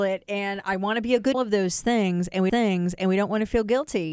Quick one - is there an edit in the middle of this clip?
yes; 2 cuts; at 1.3 s, 2.5 s

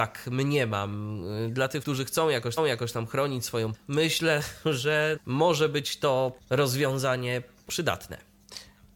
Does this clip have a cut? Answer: yes; 6 cuts; at 1.8 s, 2.6 s, 3.7 s, 5.2 s, 6.4 s, 7.7 s

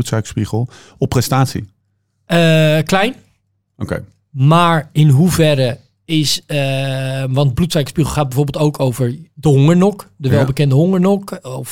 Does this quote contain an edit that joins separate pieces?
no; 0 cuts

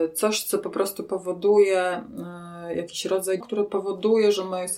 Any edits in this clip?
yes; 1 cut; at 3.4 s

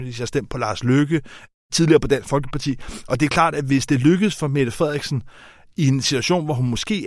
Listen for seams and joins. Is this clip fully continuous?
yes; 0 cuts

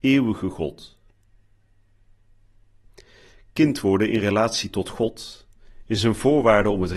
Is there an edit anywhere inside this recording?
no; 0 cuts

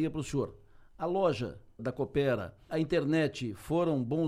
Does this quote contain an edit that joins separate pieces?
yes; 2 cuts; at 1.8 s, 2.7 s

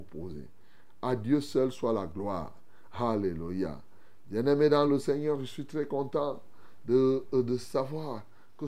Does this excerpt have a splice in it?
no; 0 cuts

